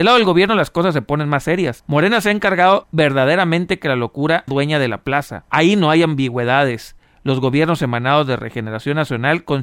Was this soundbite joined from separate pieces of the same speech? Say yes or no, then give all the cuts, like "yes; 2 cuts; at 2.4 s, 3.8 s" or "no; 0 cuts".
yes; 1 cut; at 4.5 s